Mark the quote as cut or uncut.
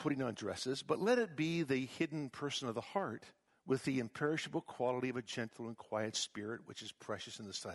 cut